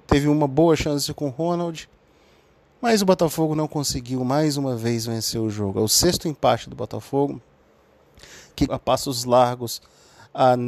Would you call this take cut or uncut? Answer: cut